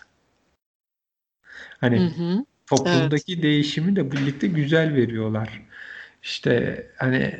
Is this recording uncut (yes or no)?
no